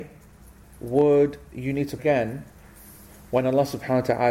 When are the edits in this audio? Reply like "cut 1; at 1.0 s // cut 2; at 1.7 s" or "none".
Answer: cut 1; at 2.0 s